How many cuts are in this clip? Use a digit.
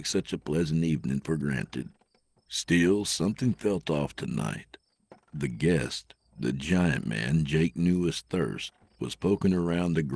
0